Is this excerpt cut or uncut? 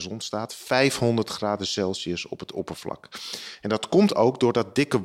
uncut